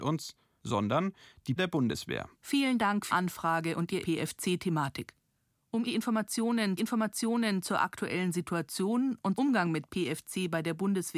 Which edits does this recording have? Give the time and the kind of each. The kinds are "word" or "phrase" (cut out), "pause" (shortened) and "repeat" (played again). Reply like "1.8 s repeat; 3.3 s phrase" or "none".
1.6 s word; 2.3 s pause; 3.1 s word; 4.0 s phrase; 5.8 s word; 6.8 s repeat; 9.3 s word

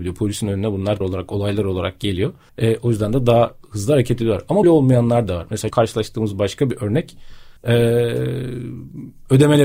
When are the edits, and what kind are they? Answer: 1.0 s word; 2.5 s pause; 4.6 s word; 5.7 s word; 7.6 s pause

